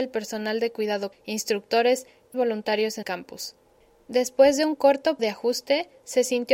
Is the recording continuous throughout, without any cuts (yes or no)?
no